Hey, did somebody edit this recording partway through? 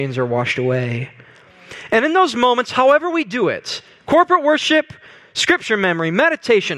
no; 0 cuts

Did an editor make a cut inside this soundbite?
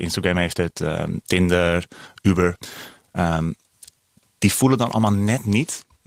no; 0 cuts

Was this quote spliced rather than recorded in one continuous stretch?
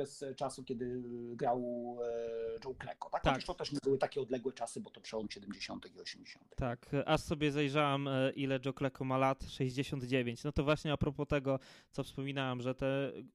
no; 0 cuts

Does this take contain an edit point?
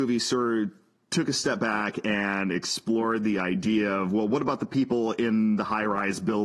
no; 0 cuts

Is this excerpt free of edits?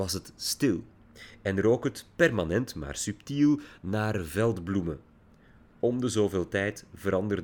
yes; 0 cuts

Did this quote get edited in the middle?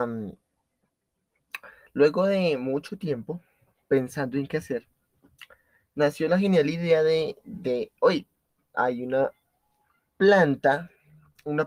no; 0 cuts

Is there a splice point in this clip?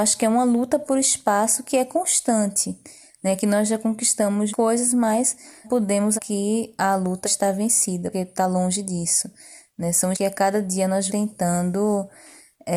yes; 7 cuts; at 4.5 s, 5.6 s, 6.2 s, 7.2 s, 8.1 s, 10.1 s, 11.1 s

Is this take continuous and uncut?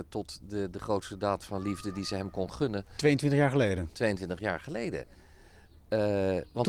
yes; 0 cuts

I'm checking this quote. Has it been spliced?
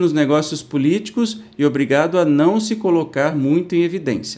no; 0 cuts

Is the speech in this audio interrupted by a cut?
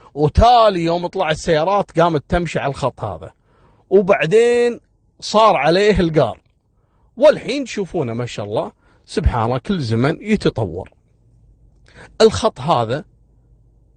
no; 0 cuts

